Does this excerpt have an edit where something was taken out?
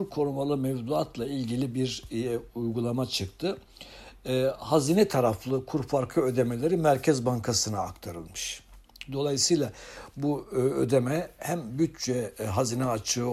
no; 0 cuts

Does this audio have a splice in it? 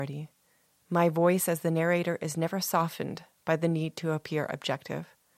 no; 0 cuts

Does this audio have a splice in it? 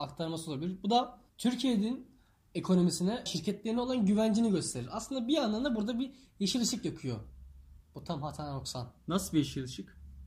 yes; 3 cuts; at 1.3 s, 3.3 s, 7.8 s

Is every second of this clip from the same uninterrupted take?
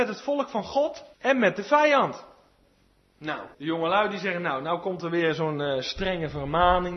no; 2 cuts; at 1.1 s, 3.5 s

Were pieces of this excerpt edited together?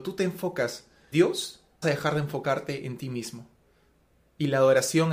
yes; 2 cuts; at 1.1 s, 1.8 s

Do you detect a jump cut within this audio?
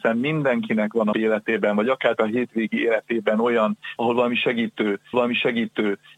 yes; 4 cuts; at 1.1 s, 2.2 s, 4.0 s, 5.1 s

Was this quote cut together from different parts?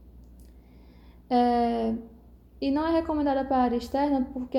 no; 0 cuts

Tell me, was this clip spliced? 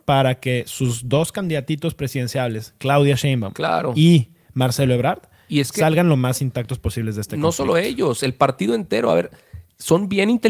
no; 0 cuts

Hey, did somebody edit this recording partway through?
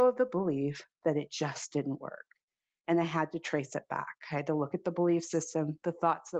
no; 0 cuts

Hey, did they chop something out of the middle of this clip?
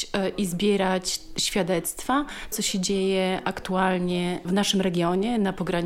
yes; 2 cuts; at 2.5 s, 4.4 s

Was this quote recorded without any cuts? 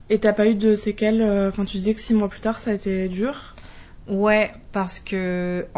yes; 0 cuts

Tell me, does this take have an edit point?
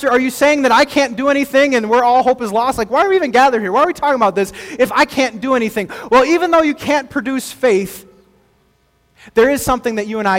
no; 0 cuts

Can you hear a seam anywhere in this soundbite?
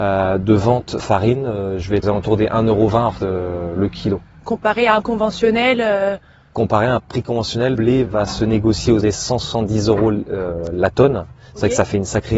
yes; 9 cuts; at 1.0 s, 2.0 s, 3.2 s, 4.4 s, 5.0 s, 7.0 s, 7.7 s, 8.1 s, 9.0 s

